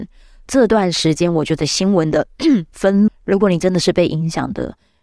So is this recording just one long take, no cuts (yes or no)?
no